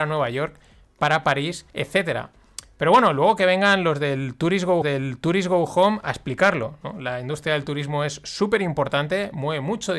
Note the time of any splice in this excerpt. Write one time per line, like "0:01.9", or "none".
0:01.7
0:04.8